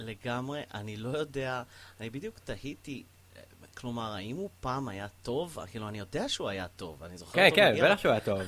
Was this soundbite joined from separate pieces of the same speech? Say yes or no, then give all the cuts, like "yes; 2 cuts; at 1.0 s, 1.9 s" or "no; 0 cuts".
yes; 1 cut; at 3.7 s